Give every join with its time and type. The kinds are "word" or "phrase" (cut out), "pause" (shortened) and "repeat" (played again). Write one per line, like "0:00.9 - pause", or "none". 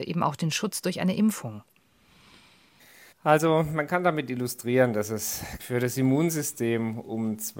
0:03.1 - pause
0:05.6 - word

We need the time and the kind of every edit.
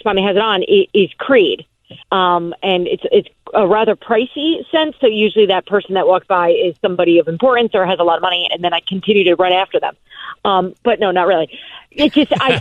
0:02.0 - pause
0:08.5 - word

